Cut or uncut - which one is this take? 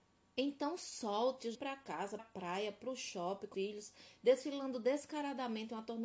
cut